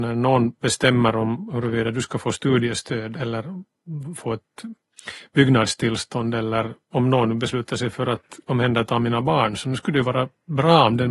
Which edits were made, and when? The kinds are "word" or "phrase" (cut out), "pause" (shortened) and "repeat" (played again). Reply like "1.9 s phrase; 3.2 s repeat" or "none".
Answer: 3.1 s word; 6.8 s pause

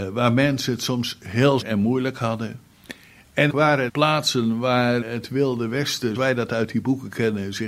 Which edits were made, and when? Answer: 1.6 s word; 3.5 s word; 3.9 s word; 5.0 s word; 6.1 s word

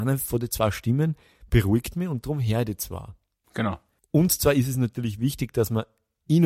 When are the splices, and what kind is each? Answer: none

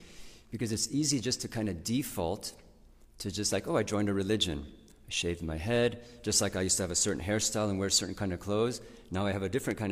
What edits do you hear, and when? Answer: none

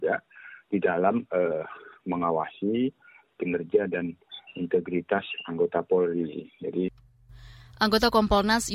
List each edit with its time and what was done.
none

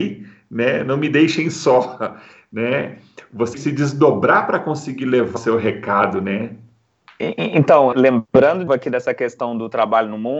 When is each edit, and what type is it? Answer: 3.5 s word; 5.4 s word; 7.9 s word; 8.7 s word

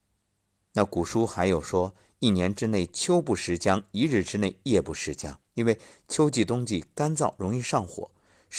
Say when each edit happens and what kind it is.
5.5 s pause

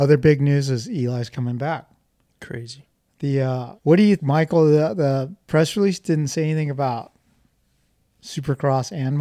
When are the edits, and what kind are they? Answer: 3.8 s pause; 4.2 s word

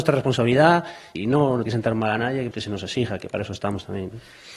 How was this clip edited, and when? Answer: 1.1 s word; 1.7 s word; 2.5 s word

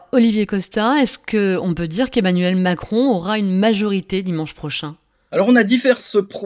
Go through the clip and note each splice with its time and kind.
none

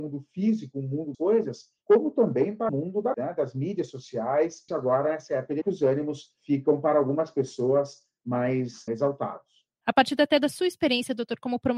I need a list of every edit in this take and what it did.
1.1 s word; 2.7 s word; 3.1 s word; 4.7 s word; 5.6 s word; 8.9 s word

